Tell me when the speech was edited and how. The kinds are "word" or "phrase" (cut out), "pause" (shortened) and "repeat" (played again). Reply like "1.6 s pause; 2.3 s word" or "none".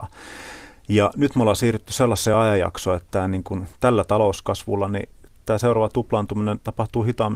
none